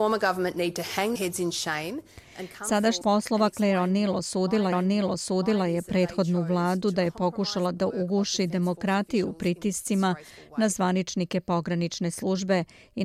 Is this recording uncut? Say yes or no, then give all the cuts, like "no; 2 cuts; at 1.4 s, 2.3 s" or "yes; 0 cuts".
no; 3 cuts; at 1.2 s, 3.0 s, 4.7 s